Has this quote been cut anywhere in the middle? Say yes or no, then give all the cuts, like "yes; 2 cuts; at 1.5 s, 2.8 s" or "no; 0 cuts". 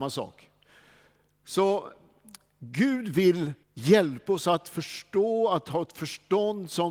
yes; 1 cut; at 3.6 s